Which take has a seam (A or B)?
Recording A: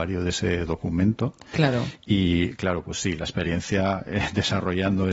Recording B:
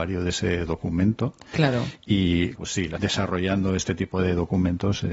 B